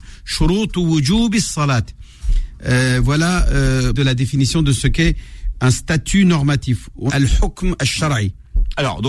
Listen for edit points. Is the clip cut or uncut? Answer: cut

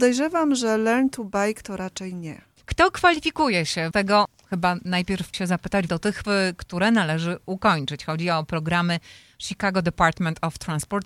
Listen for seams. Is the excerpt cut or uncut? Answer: cut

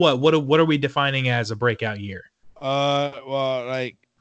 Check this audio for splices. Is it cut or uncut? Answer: uncut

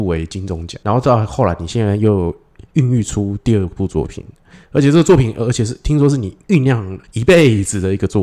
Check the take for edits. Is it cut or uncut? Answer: cut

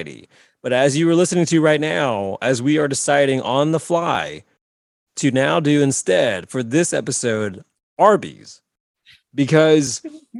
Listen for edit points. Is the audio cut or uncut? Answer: uncut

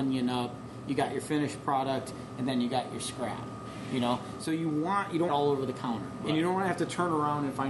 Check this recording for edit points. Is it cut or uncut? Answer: cut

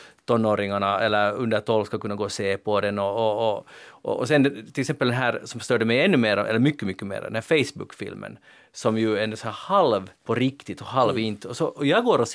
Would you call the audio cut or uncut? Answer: cut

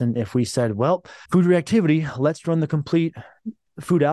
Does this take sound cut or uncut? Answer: cut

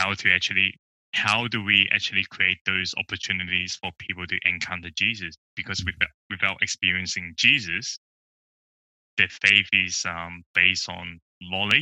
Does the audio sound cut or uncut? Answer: uncut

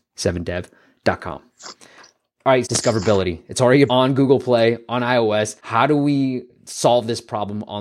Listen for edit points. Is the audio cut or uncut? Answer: cut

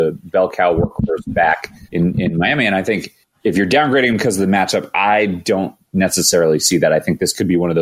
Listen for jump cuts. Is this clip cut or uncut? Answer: cut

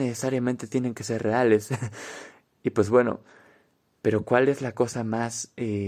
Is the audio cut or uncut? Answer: uncut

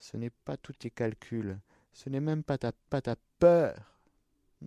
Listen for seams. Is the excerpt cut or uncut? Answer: cut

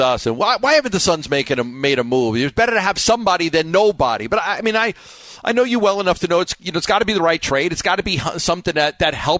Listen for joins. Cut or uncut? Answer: uncut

